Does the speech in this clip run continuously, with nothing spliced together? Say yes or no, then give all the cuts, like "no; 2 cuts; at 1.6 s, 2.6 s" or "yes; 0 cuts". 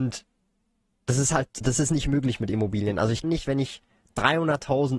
no; 2 cuts; at 1.6 s, 3.2 s